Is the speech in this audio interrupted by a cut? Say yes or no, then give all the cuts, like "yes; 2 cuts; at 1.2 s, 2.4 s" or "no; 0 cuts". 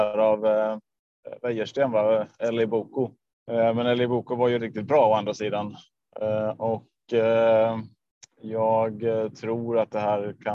yes; 2 cuts; at 3.3 s, 4.6 s